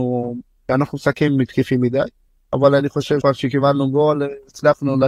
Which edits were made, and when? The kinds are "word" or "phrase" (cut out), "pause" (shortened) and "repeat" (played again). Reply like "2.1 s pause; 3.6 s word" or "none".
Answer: 3.2 s word